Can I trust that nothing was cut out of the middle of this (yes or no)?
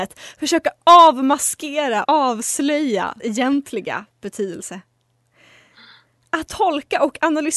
no